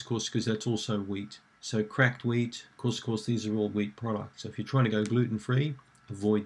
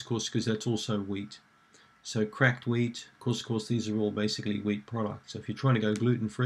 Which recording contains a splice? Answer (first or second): first